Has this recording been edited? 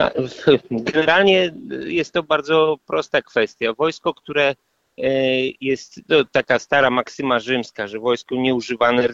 no; 0 cuts

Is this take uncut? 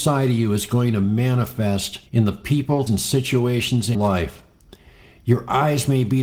no; 3 cuts; at 2.1 s, 2.9 s, 3.9 s

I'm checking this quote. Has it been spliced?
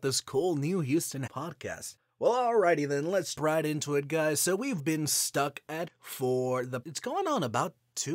yes; 5 cuts; at 1.3 s, 3.4 s, 4.8 s, 5.9 s, 6.8 s

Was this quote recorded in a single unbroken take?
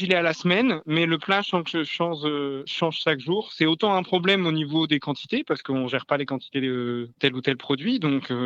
yes; 0 cuts

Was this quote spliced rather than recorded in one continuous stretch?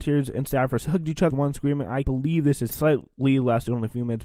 yes; 3 cuts; at 1.3 s, 2.0 s, 2.7 s

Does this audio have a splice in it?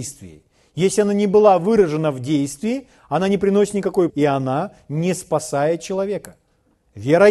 yes; 1 cut; at 4.1 s

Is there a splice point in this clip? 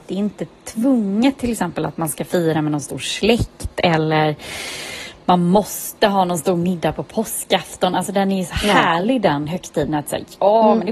no; 0 cuts

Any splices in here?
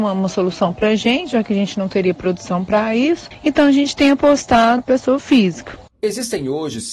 yes; 1 cut; at 4.8 s

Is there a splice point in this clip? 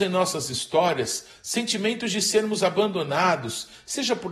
no; 0 cuts

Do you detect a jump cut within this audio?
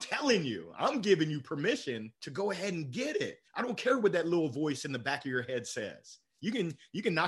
yes; 2 cuts; at 2.2 s, 3.5 s

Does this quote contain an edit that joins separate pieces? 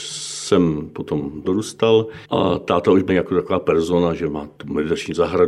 yes; 4 cuts; at 1.4 s, 2.2 s, 3.1 s, 4.6 s

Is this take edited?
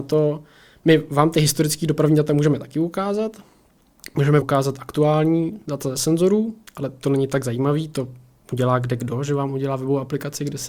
yes; 1 cut; at 4.4 s

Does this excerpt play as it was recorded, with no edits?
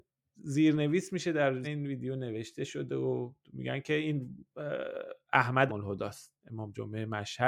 no; 3 cuts; at 1.6 s, 5.7 s, 6.4 s

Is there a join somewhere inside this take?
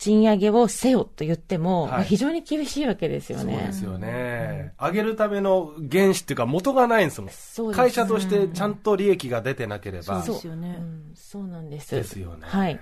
yes; 1 cut; at 7.3 s

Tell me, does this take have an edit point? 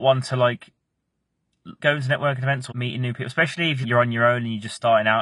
yes; 3 cuts; at 1.8 s, 2.7 s, 3.8 s

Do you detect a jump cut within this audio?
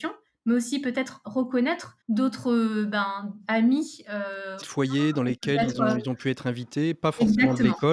yes; 2 cuts; at 2.0 s, 4.6 s

